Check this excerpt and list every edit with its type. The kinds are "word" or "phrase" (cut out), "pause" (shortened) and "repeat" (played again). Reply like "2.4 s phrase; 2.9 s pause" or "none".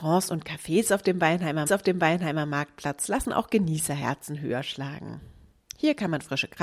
1.7 s repeat